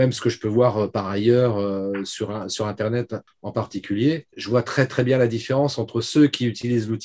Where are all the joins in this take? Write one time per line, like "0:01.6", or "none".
0:04.3